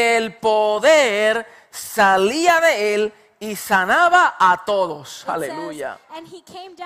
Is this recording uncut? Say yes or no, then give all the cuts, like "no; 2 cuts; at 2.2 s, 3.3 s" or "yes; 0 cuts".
yes; 0 cuts